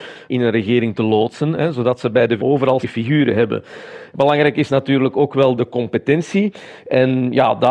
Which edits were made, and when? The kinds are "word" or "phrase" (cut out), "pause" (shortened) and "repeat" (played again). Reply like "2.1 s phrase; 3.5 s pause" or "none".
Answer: 2.4 s word; 2.8 s word; 5.6 s word